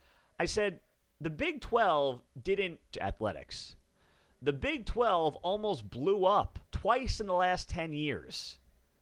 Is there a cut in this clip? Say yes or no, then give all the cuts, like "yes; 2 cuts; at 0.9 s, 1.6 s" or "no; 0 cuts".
yes; 2 cuts; at 2.9 s, 6.7 s